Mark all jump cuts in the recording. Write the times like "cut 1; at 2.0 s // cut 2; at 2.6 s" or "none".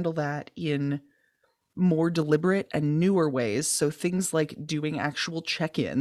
none